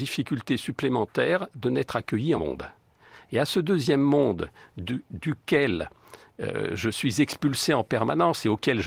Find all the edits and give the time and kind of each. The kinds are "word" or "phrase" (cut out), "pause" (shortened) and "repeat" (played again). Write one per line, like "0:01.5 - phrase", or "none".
0:02.4 - phrase